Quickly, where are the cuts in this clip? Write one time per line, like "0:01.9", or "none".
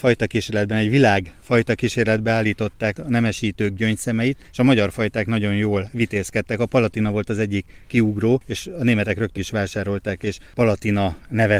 0:02.9
0:04.5
0:09.4